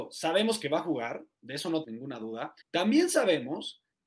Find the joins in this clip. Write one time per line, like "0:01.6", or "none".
0:01.8
0:02.6